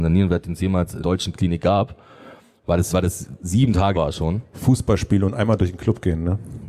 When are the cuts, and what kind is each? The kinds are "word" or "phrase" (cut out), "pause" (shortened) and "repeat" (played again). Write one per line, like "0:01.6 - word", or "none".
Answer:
0:01.0 - word
0:02.9 - word
0:03.9 - word